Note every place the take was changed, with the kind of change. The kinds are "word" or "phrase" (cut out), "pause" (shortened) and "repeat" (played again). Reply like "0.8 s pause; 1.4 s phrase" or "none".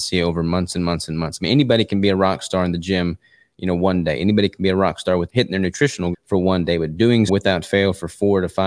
5.3 s word; 6.1 s word; 7.3 s word